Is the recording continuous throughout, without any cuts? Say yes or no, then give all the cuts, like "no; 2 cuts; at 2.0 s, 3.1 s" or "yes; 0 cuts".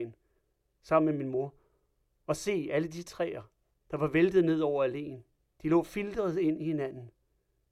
yes; 0 cuts